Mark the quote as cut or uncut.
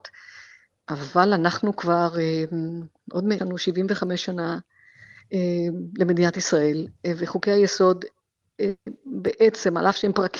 cut